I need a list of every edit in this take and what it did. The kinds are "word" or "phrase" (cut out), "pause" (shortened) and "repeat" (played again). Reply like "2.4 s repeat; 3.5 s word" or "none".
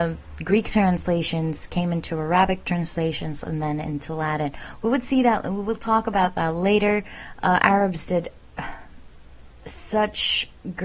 none

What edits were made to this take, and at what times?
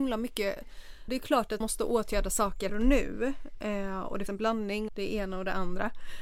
1.1 s word; 1.6 s word; 2.7 s word; 4.3 s word; 4.9 s word

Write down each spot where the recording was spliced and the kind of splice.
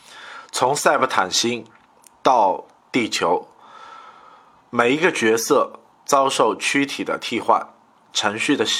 none

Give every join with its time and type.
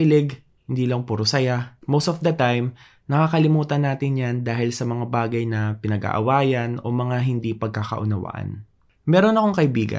none

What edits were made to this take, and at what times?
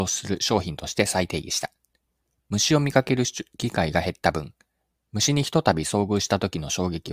none

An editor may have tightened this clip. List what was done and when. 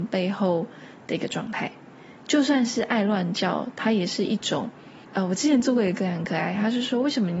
5.0 s pause

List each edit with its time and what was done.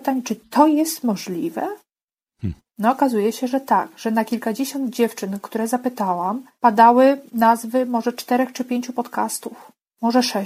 6.5 s pause

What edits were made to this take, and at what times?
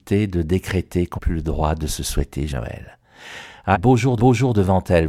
1.1 s word; 2.5 s word; 3.7 s phrase; 4.2 s repeat

